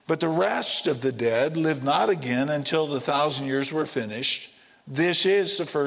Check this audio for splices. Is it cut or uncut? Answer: uncut